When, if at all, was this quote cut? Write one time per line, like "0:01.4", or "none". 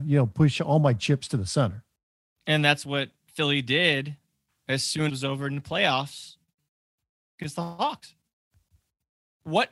0:04.5
0:05.1

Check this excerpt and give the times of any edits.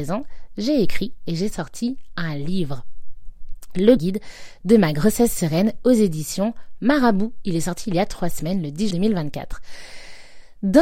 0:04.0
0:08.9

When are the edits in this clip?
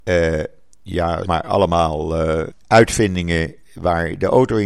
0:01.3
0:02.5

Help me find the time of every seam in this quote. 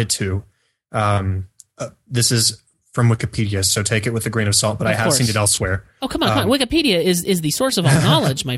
none

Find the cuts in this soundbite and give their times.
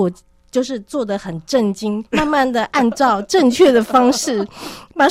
0:02.1

